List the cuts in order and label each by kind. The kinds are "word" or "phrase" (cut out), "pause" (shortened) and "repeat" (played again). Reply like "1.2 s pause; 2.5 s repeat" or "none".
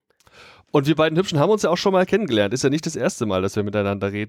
none

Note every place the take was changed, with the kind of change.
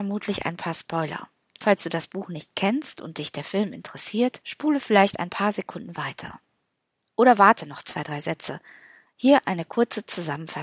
none

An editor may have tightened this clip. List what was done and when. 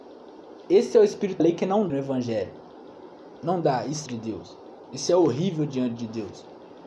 1.4 s word; 1.9 s phrase; 4.1 s phrase

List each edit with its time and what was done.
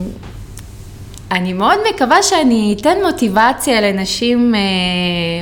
none

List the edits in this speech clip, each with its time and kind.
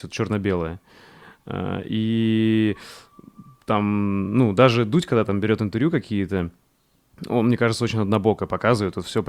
none

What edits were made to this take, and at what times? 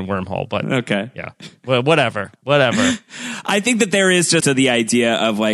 4.4 s word

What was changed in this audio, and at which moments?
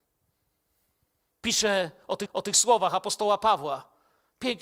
2.3 s repeat

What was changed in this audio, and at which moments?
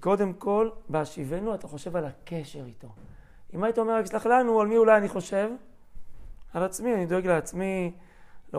none

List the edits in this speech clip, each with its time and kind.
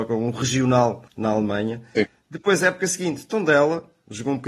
1.1 s pause

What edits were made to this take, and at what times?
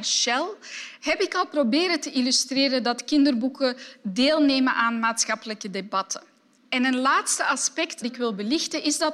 8.0 s word

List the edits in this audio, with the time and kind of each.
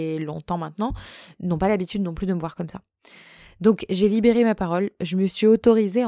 none

